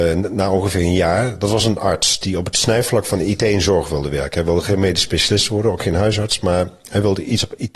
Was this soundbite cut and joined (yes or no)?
no